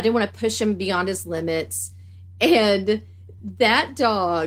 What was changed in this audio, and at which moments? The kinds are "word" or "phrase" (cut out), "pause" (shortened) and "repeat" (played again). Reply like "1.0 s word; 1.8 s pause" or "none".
none